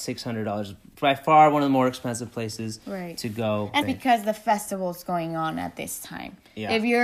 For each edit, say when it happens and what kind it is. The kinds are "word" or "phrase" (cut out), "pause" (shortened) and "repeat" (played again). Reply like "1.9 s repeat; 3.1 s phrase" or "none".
3.8 s phrase